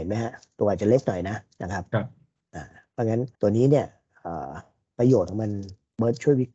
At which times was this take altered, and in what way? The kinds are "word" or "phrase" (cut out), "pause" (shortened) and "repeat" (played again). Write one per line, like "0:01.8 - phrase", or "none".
0:03.3 - pause